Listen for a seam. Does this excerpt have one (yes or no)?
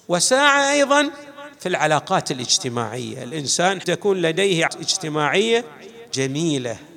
yes